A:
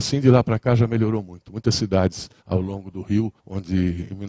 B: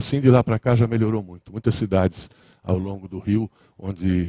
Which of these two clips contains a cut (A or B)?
A